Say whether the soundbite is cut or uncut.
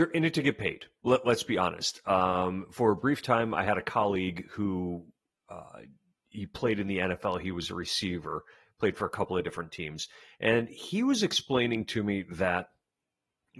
uncut